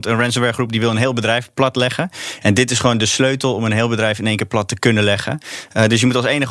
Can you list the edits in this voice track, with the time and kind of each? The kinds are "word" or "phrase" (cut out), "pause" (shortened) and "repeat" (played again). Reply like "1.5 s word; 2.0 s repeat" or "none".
none